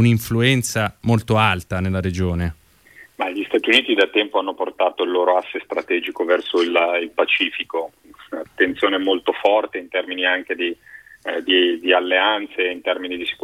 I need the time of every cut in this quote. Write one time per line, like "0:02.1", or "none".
0:02.8